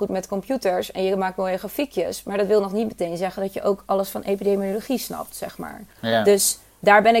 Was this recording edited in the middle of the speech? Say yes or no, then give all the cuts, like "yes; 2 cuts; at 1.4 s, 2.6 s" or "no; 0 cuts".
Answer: yes; 1 cut; at 5.9 s